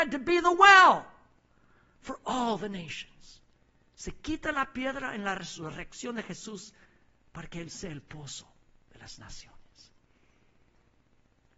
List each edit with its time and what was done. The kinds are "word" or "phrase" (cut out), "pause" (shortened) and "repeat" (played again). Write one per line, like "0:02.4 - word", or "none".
none